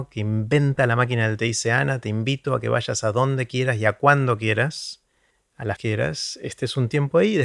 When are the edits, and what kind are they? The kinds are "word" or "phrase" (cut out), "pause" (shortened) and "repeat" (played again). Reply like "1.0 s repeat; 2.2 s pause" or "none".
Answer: 1.4 s phrase; 5.3 s pause; 5.8 s phrase